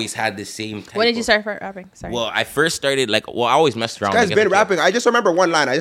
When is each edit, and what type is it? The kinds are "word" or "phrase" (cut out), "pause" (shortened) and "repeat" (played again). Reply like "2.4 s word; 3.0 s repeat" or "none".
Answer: none